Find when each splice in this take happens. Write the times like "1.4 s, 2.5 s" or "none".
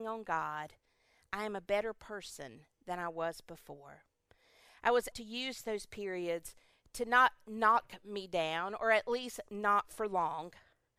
5.1 s